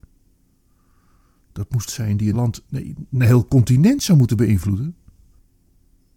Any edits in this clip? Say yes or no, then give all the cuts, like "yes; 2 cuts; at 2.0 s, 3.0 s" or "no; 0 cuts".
yes; 3 cuts; at 1.9 s, 2.3 s, 2.7 s